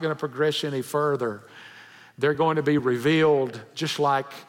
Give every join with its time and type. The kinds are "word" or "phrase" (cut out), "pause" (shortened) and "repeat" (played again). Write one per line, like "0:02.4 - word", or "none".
none